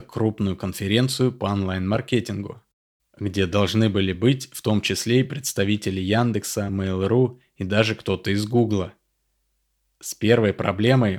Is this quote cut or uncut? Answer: uncut